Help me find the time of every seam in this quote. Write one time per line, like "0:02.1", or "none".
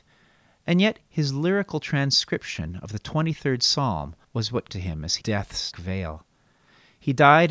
0:04.2
0:04.7
0:05.2
0:05.7